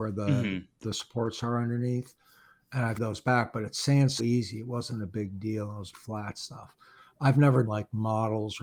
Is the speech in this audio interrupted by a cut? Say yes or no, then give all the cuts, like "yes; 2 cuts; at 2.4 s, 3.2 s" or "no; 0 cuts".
yes; 4 cuts; at 3.0 s, 4.2 s, 5.9 s, 7.7 s